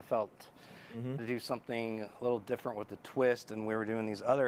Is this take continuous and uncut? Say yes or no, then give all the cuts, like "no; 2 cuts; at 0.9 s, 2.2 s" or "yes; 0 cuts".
no; 1 cut; at 1.2 s